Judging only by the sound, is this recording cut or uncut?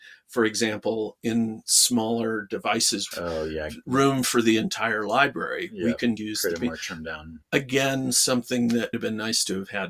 cut